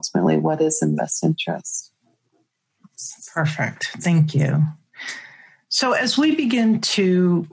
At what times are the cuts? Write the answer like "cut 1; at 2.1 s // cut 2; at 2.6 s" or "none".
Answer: cut 1; at 1.0 s